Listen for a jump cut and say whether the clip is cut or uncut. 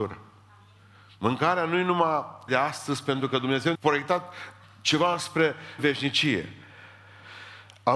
cut